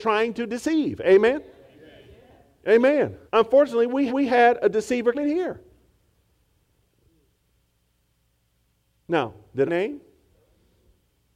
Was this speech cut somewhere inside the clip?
yes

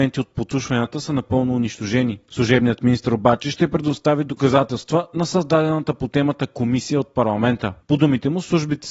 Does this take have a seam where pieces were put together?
no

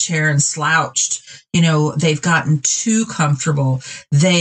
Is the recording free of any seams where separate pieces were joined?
yes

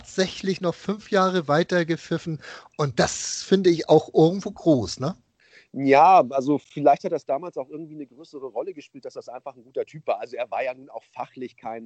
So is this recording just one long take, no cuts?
yes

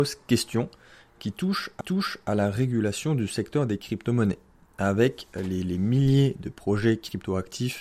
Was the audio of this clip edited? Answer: yes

